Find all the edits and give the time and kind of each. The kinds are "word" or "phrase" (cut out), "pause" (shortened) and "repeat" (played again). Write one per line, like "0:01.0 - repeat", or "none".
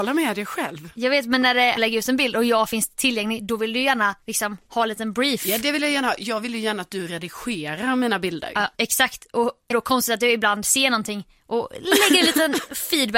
0:01.8 - phrase
0:04.2 - pause
0:08.7 - pause
0:09.7 - word